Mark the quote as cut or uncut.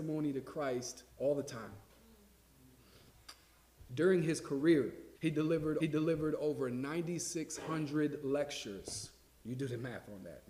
cut